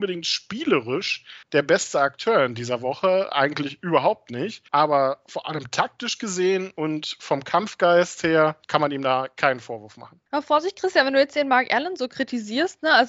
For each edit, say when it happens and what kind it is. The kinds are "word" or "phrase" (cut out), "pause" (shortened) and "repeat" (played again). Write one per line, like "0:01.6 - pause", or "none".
0:01.4 - pause
0:04.7 - pause
0:08.6 - pause
0:10.3 - pause